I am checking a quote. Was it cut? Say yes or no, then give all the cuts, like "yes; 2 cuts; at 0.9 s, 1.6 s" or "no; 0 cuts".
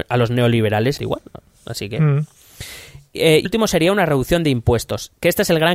yes; 2 cuts; at 1.0 s, 3.4 s